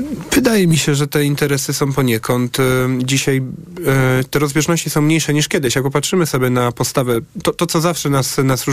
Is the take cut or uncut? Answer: uncut